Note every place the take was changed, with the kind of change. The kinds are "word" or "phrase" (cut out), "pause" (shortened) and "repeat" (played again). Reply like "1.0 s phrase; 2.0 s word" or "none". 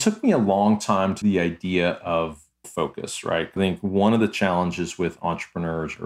1.2 s word; 2.6 s word; 3.6 s word